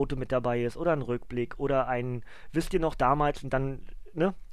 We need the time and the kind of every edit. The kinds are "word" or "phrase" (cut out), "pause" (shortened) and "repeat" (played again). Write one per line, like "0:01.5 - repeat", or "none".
none